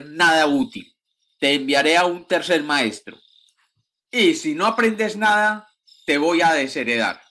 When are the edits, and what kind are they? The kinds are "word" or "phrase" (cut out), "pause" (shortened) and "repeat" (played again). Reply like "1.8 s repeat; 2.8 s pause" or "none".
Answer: none